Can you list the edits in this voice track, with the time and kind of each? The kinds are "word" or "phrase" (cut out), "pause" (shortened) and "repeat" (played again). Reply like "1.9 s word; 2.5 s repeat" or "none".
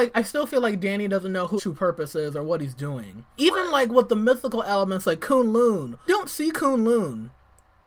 1.6 s word; 3.4 s word; 6.1 s word